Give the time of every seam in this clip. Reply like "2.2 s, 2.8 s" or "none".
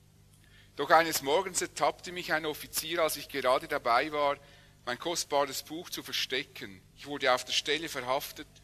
6.9 s